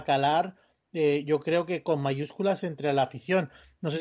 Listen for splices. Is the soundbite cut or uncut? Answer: uncut